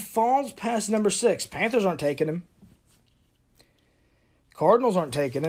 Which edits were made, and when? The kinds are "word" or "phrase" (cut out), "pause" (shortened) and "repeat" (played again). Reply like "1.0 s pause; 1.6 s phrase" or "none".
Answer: none